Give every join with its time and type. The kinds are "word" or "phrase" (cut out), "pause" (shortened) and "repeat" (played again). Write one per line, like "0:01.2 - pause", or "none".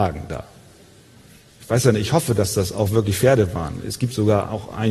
none